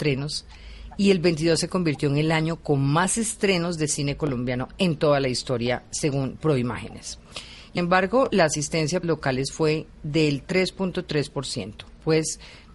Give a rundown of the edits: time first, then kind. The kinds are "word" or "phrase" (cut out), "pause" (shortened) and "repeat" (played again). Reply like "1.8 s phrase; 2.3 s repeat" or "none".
7.8 s word; 9.0 s word

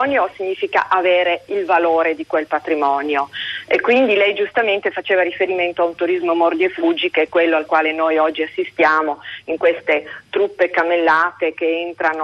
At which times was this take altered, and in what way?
none

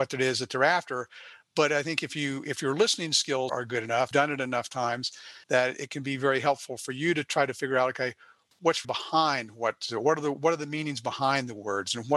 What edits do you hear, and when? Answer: 3.5 s word; 4.1 s phrase; 5.4 s pause; 8.8 s word; 9.8 s word

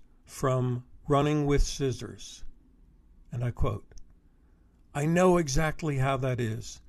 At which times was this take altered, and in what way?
none

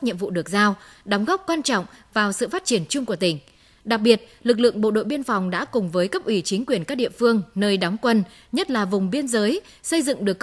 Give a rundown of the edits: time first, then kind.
none

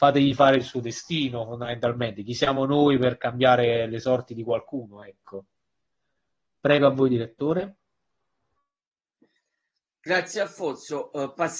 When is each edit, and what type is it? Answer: none

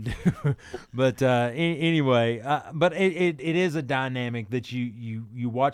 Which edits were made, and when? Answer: none

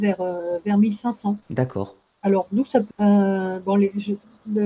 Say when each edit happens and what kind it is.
1.4 s pause; 2.9 s word

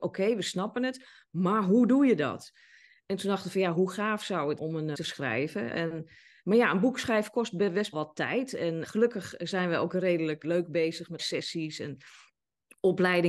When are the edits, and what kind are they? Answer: 4.6 s word; 4.9 s word; 7.9 s word; 8.8 s word; 10.4 s word; 11.2 s word

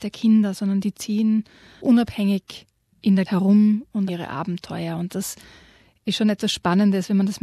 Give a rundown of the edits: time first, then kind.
1.8 s word; 3.3 s word; 4.1 s word

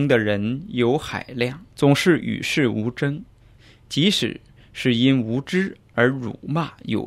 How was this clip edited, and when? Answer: 1.7 s pause; 3.4 s pause

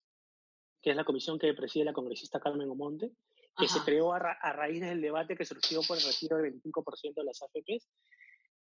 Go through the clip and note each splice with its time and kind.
none

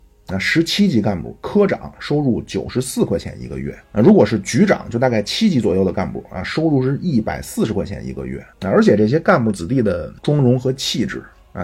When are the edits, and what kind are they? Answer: 3.8 s pause; 8.5 s pause; 10.2 s pause

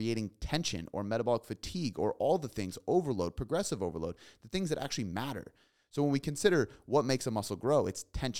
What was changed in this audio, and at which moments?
none

